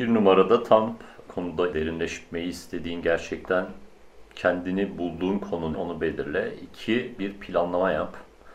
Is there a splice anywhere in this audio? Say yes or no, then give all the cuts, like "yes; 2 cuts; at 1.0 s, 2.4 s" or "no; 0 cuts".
yes; 4 cuts; at 1.3 s, 1.7 s, 5.7 s, 7.2 s